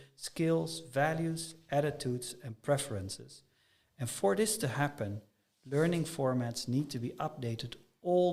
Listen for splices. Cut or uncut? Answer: uncut